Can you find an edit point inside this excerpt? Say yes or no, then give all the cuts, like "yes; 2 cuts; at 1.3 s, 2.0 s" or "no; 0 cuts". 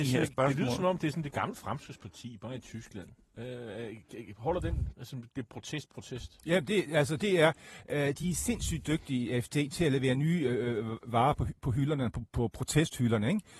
no; 0 cuts